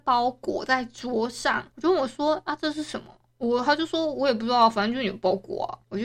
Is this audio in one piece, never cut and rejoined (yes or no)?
yes